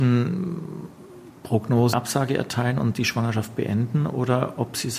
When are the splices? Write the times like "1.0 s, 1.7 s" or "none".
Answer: 1.9 s